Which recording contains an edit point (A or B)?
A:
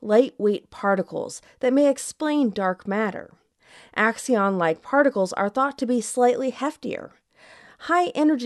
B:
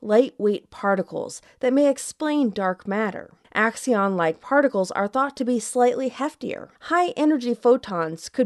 B